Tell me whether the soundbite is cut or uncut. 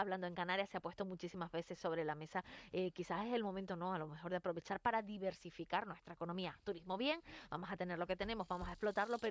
uncut